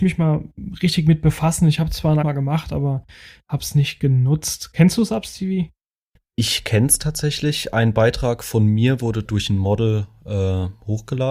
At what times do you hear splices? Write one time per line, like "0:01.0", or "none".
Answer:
0:02.2
0:09.3